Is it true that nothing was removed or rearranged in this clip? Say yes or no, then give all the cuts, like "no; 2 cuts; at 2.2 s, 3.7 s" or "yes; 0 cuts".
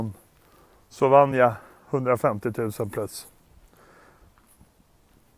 yes; 0 cuts